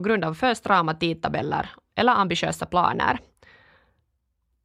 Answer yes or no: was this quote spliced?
no